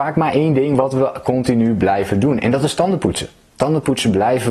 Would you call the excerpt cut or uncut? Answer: uncut